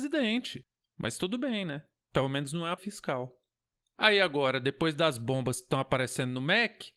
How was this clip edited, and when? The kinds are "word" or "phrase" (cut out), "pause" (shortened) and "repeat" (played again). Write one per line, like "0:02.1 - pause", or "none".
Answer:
0:02.8 - word

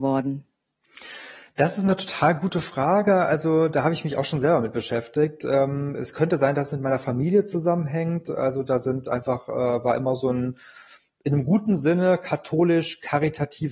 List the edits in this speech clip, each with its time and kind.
none

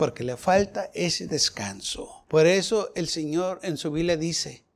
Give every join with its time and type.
0:02.2 - pause

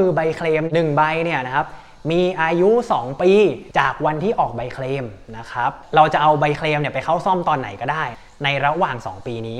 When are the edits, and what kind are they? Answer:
none

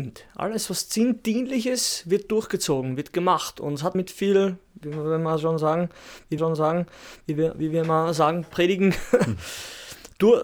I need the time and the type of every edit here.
0:03.9 - word
0:06.4 - repeat

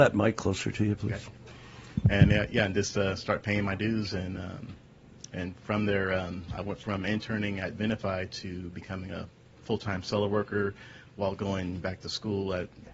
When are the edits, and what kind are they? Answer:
none

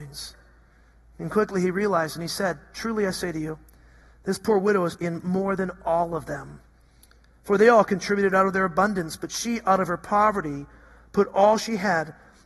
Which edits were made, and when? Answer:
0:05.0 - word

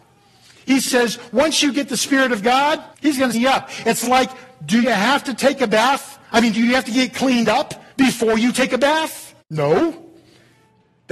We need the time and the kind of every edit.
0:02.9 - pause
0:03.3 - phrase
0:06.2 - pause
0:07.9 - pause
0:09.4 - pause

